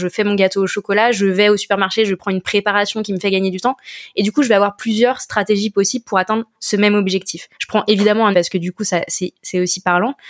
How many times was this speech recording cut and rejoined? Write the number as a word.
three